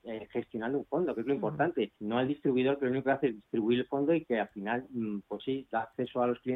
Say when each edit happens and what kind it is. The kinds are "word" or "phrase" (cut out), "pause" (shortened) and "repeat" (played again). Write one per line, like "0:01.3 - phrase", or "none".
0:02.0 - pause
0:05.4 - word